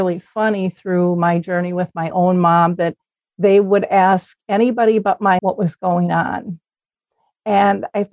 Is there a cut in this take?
yes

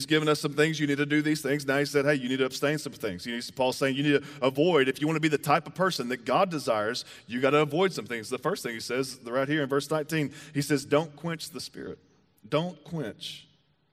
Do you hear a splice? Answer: no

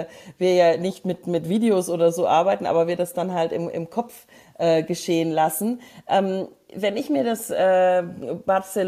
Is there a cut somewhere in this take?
no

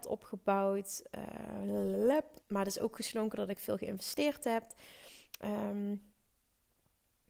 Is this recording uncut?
no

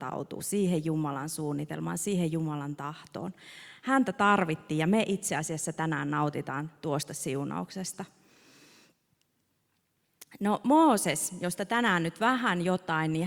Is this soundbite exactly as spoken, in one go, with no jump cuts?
yes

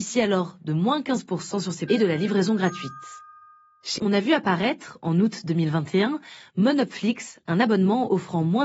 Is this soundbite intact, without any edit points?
no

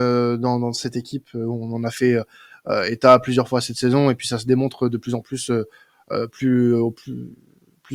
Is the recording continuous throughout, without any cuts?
yes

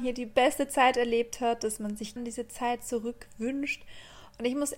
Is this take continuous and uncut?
no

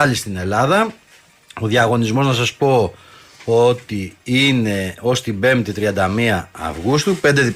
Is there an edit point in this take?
no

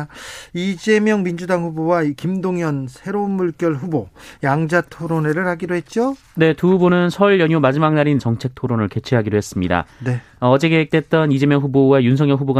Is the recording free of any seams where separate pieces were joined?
no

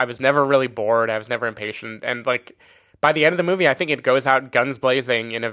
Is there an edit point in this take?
no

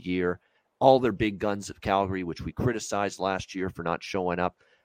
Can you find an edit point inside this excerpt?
no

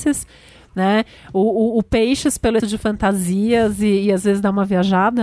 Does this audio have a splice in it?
yes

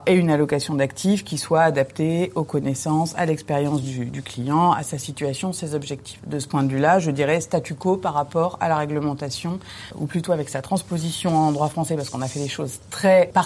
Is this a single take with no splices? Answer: yes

